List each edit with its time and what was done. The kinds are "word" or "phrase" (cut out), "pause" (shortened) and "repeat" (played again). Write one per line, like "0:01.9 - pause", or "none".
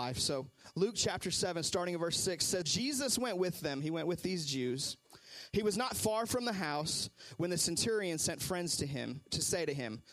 0:02.6 - word